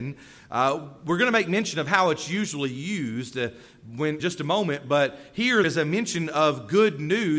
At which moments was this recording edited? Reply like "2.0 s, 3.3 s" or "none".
4.2 s, 5.6 s